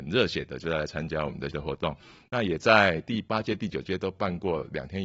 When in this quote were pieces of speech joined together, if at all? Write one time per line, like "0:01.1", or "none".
0:01.5